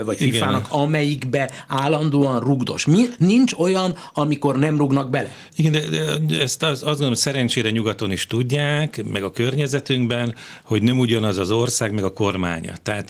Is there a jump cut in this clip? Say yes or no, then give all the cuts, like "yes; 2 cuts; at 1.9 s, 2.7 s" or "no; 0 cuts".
no; 0 cuts